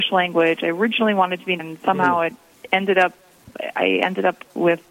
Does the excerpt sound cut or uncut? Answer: cut